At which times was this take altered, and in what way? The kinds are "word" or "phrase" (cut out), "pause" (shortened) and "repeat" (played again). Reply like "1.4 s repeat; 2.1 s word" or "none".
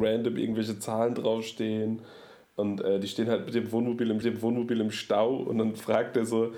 4.2 s repeat